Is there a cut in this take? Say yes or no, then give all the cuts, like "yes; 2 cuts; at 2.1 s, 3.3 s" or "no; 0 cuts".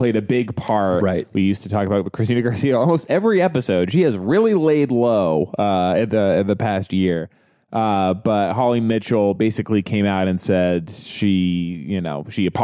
no; 0 cuts